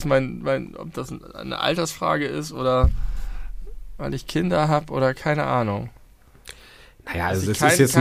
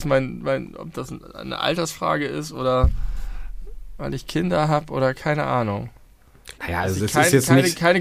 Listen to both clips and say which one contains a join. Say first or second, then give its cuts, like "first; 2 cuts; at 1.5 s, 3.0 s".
second; 1 cut; at 6.5 s